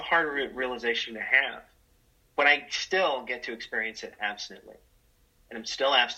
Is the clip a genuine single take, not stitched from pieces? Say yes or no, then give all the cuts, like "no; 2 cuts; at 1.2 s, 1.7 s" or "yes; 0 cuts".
yes; 0 cuts